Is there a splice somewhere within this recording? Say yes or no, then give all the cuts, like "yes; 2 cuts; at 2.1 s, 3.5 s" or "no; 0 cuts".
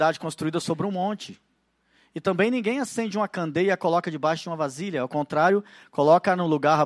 no; 0 cuts